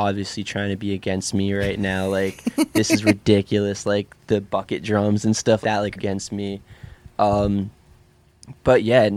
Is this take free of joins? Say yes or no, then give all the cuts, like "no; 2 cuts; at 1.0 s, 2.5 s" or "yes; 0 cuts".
no; 3 cuts; at 4.2 s, 5.6 s, 6.0 s